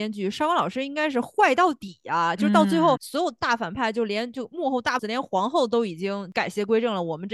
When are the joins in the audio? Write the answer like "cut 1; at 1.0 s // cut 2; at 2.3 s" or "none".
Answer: cut 1; at 3.0 s // cut 2; at 5.0 s